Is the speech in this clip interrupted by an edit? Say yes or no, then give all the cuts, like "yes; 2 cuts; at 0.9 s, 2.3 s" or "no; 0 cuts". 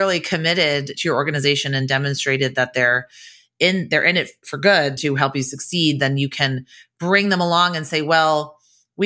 yes; 1 cut; at 5.0 s